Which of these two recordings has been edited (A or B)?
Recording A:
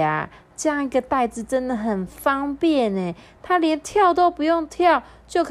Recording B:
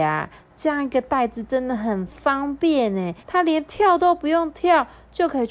B